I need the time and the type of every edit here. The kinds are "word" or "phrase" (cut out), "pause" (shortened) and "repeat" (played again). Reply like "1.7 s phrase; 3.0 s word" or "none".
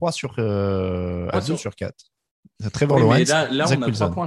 1.3 s phrase